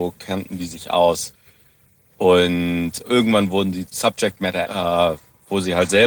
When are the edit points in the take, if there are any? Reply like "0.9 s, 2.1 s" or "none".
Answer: 3.0 s, 3.9 s, 4.6 s